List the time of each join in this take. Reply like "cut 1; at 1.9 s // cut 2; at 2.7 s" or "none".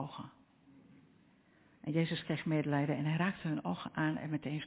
none